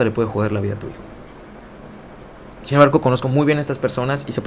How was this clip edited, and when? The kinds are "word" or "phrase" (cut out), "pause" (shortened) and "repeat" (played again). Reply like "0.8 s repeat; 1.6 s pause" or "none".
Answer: none